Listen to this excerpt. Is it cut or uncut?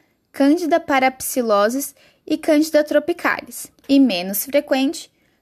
cut